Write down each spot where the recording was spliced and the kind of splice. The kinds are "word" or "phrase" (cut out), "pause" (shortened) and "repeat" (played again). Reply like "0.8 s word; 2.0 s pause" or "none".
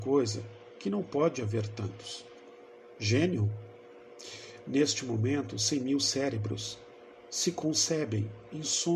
none